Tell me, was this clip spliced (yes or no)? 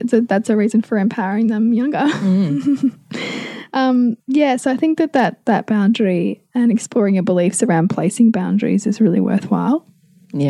yes